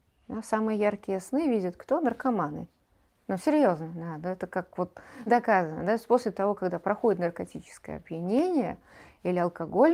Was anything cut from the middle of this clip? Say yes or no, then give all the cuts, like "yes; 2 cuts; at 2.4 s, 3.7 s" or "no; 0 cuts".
yes; 2 cuts; at 3.1 s, 5.3 s